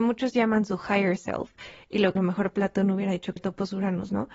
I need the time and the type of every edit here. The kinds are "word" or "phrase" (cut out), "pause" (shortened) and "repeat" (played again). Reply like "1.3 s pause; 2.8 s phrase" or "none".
2.2 s phrase; 3.4 s word